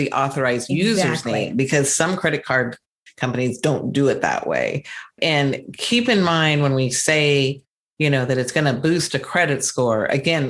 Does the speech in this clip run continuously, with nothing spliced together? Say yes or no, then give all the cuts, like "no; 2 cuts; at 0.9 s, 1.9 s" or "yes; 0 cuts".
yes; 0 cuts